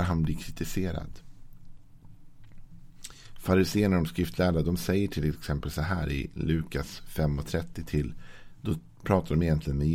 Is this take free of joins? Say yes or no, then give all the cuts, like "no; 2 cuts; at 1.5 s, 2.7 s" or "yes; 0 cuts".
yes; 0 cuts